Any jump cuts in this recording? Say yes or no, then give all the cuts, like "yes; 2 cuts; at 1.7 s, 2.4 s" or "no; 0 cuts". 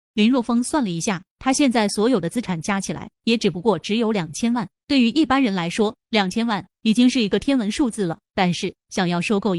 yes; 1 cut; at 4.8 s